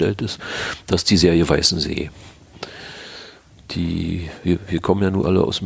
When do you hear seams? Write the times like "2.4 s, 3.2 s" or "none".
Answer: none